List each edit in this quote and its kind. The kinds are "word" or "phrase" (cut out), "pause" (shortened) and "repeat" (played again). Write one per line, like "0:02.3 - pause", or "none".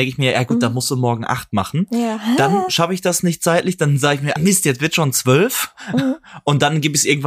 0:04.4 - word